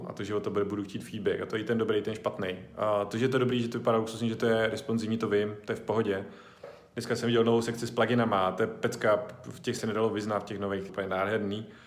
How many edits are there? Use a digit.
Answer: 2